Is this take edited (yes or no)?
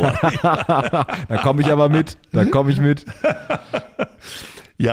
no